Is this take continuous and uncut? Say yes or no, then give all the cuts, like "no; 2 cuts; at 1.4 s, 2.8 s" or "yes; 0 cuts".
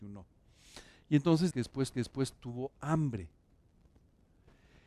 no; 2 cuts; at 1.5 s, 1.9 s